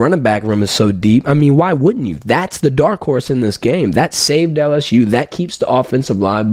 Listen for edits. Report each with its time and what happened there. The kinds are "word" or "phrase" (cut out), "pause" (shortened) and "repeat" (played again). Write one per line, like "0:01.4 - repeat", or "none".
none